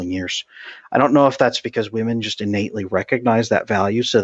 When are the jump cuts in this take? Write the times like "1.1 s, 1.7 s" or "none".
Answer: none